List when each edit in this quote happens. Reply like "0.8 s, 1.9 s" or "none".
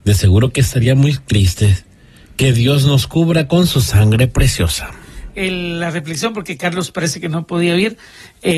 none